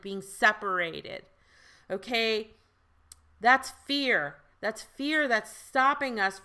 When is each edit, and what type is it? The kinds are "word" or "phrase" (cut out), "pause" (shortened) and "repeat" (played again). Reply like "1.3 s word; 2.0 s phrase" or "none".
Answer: none